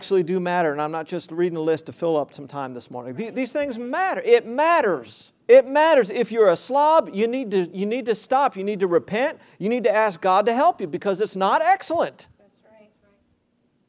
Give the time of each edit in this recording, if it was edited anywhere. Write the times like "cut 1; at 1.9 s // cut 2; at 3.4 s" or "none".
cut 1; at 5.4 s